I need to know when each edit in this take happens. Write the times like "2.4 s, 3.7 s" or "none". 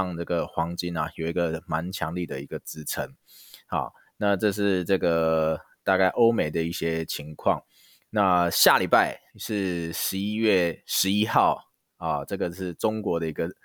9.3 s